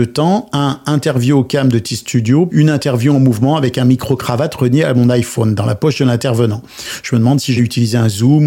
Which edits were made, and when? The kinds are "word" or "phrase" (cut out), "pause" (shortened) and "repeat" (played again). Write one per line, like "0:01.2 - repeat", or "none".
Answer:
0:02.5 - word
0:07.6 - word